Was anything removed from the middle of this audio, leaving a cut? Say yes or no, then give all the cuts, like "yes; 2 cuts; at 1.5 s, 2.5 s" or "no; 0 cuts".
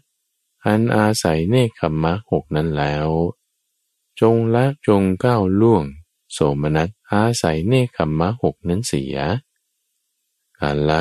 yes; 2 cuts; at 4.8 s, 7.0 s